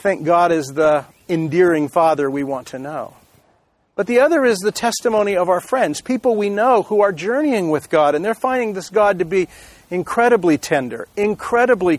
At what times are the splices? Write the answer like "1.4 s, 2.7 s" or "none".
none